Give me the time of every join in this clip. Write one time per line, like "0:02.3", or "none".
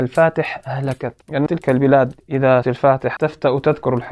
0:01.5
0:02.6
0:03.2